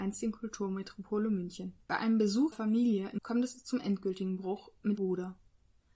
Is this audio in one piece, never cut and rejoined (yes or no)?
no